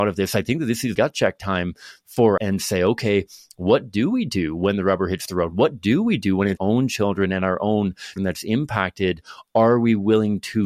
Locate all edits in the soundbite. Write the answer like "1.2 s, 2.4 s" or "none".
1.0 s, 2.4 s, 6.6 s, 8.2 s